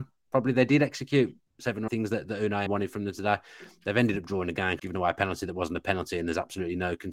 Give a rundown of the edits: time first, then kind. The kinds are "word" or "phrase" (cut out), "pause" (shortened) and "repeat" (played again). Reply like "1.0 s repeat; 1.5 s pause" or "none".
1.5 s word; 1.9 s word; 2.7 s word; 4.8 s word